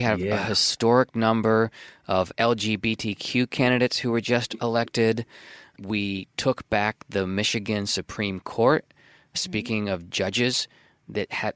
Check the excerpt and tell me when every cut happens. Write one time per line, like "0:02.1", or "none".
none